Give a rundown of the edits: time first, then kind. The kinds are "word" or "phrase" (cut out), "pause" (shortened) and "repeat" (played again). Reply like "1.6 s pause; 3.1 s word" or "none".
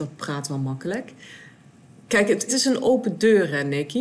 1.8 s pause; 2.5 s word